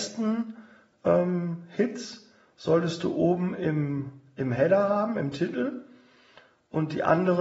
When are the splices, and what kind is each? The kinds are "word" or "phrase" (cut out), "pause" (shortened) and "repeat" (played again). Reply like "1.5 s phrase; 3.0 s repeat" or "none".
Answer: none